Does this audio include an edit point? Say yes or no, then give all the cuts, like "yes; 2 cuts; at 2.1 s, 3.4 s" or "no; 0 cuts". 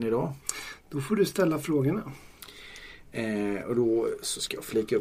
no; 0 cuts